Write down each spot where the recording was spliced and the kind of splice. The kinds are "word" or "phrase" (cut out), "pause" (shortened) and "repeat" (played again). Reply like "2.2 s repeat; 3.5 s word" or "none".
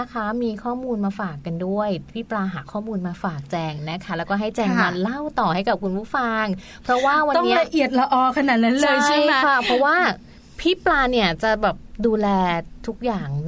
none